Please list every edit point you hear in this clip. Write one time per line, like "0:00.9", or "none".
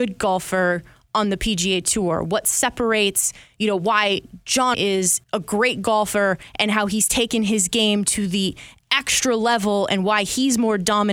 0:04.7
0:05.2